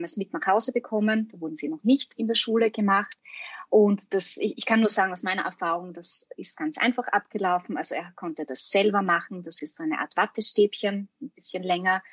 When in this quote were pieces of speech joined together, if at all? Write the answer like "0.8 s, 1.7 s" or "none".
none

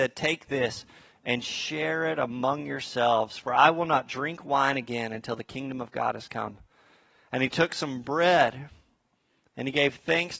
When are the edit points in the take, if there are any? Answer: none

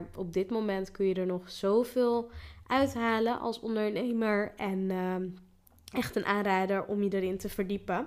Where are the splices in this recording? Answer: none

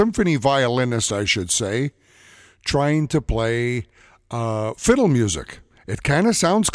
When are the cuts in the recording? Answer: none

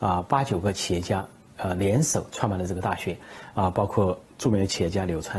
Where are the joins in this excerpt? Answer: none

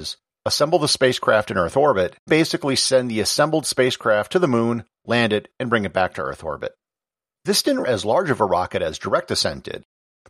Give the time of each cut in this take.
2.3 s, 7.8 s

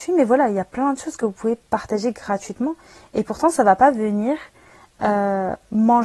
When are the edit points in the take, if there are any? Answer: none

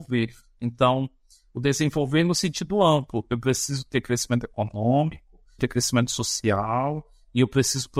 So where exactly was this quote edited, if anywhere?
5.6 s

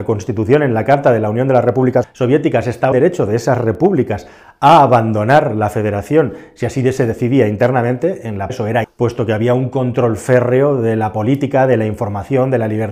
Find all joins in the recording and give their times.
2.0 s, 2.9 s, 8.5 s, 8.8 s

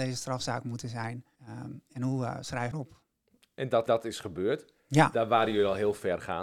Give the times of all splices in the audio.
1.4 s, 2.7 s, 3.9 s, 4.8 s

